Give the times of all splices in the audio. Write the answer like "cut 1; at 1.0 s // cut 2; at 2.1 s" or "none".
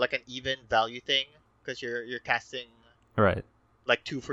none

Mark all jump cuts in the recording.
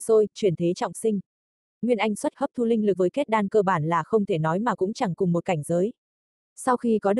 cut 1; at 2.3 s // cut 2; at 3.0 s

